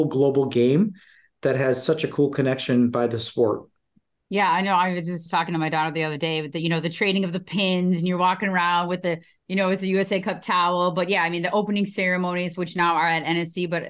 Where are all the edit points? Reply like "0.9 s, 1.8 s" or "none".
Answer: 5.3 s